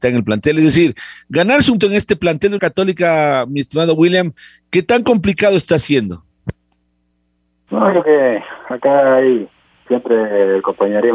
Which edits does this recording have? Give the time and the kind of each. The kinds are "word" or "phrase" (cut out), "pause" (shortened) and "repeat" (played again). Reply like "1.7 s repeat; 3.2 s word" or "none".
1.8 s word; 2.6 s word; 8.0 s word; 9.9 s word